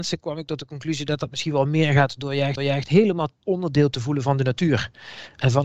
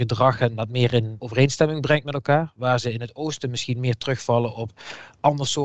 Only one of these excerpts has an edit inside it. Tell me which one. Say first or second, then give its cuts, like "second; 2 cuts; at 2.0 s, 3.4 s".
first; 1 cut; at 2.6 s